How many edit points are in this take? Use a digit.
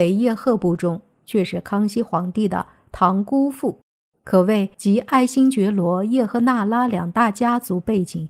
1